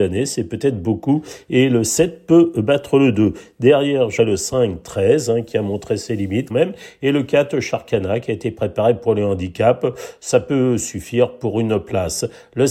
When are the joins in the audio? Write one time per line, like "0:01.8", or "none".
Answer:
0:04.2
0:06.5